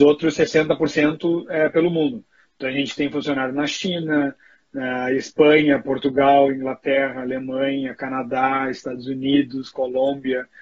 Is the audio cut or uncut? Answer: uncut